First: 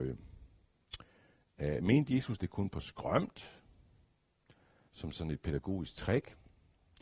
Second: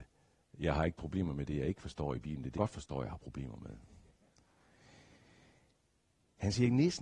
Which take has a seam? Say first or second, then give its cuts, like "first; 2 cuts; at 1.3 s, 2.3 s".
second; 1 cut; at 2.6 s